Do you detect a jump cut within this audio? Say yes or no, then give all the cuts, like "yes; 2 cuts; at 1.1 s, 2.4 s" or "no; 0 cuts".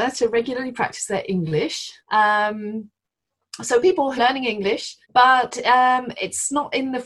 yes; 3 cuts; at 2.0 s, 4.2 s, 5.0 s